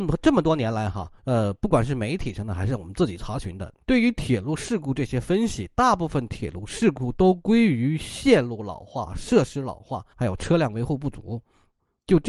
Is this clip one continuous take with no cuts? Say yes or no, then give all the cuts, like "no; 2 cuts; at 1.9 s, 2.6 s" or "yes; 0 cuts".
no; 3 cuts; at 1.2 s, 3.8 s, 10.1 s